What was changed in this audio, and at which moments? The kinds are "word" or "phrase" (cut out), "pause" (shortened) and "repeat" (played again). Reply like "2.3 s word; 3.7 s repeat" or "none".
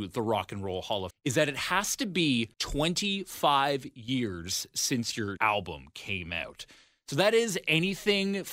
1.1 s word; 2.5 s pause; 5.4 s word